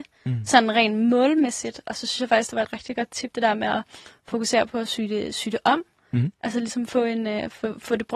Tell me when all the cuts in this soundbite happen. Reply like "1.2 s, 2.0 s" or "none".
none